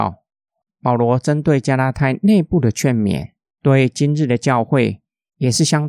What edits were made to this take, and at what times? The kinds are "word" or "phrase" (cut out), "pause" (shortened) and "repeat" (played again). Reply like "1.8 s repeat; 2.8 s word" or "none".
3.4 s pause